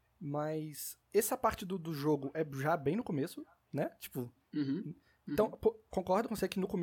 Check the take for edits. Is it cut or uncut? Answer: uncut